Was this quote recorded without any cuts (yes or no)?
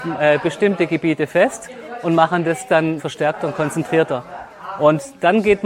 no